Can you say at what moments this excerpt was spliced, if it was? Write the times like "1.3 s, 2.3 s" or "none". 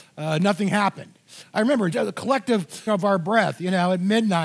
1.9 s, 2.9 s